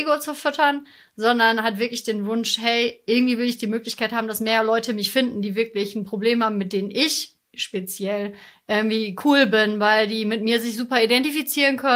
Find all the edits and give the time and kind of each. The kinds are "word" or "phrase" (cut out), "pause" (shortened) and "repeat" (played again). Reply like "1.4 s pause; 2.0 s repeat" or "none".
none